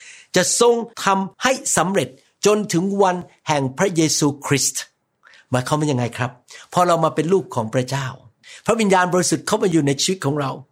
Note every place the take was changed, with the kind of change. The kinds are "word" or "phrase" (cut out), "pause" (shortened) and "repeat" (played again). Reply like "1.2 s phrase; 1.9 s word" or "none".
0.9 s pause; 1.3 s pause